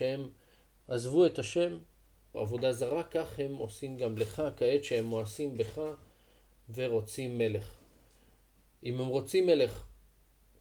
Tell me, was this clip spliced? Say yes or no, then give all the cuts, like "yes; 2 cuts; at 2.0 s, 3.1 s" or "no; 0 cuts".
yes; 1 cut; at 2.3 s